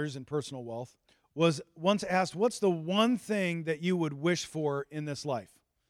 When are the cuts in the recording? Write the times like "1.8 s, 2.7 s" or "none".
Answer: 1.1 s